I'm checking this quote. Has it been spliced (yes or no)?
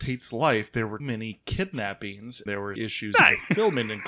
yes